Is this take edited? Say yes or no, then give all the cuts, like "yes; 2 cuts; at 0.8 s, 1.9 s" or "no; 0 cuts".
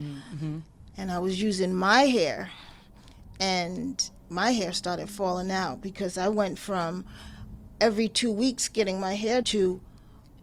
yes; 2 cuts; at 4.2 s, 9.4 s